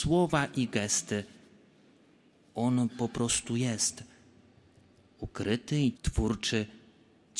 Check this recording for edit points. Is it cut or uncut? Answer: cut